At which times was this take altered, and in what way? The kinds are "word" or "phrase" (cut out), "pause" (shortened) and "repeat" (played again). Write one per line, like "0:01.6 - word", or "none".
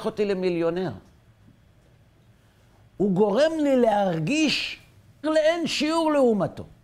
0:05.2 - word